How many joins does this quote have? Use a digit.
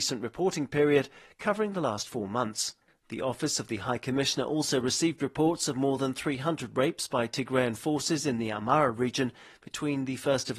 0